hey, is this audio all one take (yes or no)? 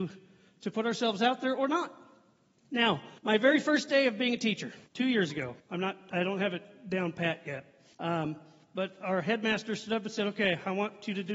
no